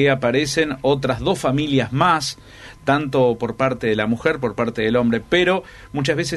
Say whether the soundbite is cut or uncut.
uncut